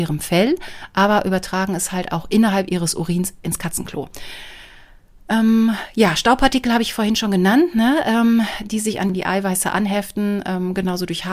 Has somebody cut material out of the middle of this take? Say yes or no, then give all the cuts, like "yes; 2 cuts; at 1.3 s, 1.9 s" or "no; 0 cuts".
no; 0 cuts